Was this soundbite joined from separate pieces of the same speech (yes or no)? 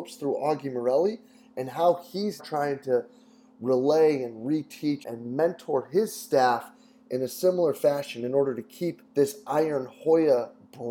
yes